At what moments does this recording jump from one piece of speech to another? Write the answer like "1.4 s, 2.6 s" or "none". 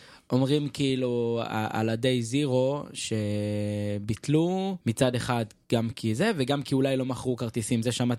4.8 s